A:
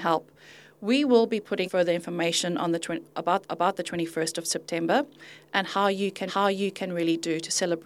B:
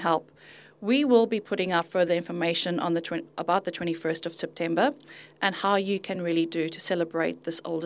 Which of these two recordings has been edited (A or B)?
A